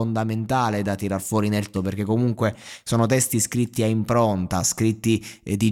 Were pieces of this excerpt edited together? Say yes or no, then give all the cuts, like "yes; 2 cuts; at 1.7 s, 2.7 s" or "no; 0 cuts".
yes; 1 cut; at 1.7 s